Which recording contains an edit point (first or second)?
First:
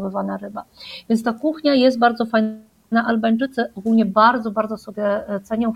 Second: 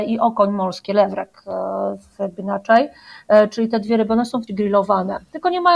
second